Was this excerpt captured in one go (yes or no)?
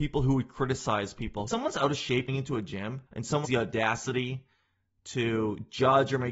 no